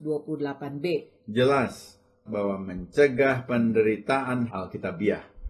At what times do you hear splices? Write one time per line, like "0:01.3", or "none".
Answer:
0:02.3
0:04.5